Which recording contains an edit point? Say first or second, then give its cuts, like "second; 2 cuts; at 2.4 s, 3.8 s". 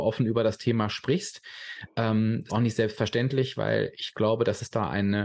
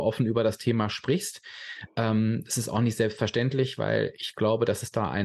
first; 1 cut; at 2.5 s